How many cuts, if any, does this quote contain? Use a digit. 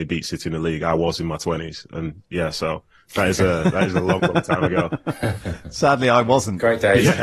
0